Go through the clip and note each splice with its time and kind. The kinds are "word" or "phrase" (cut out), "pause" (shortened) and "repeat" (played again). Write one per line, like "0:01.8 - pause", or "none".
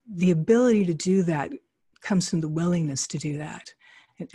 none